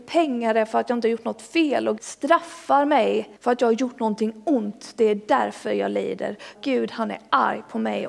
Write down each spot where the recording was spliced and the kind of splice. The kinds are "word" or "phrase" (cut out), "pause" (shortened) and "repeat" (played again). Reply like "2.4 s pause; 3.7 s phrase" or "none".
2.0 s word; 3.4 s pause; 6.5 s phrase